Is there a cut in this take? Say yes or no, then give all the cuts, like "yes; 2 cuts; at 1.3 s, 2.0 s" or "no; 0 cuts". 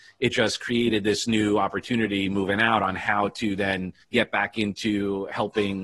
yes; 1 cut; at 4.0 s